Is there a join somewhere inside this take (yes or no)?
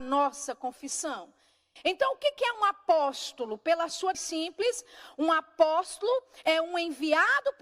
yes